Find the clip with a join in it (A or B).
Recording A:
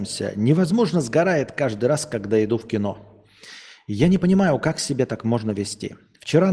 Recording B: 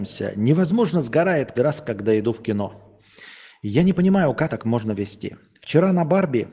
B